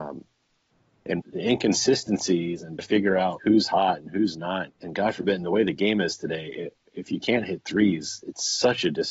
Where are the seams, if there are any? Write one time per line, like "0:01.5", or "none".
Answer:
0:01.2
0:02.8
0:03.4
0:04.7